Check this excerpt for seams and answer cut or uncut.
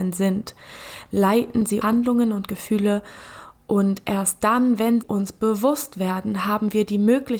cut